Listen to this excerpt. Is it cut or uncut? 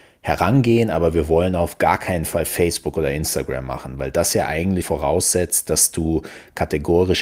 cut